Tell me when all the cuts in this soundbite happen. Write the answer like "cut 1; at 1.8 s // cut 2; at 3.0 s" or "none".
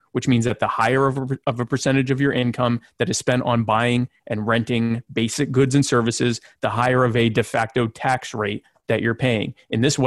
none